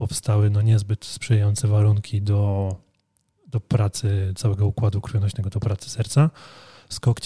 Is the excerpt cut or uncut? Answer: uncut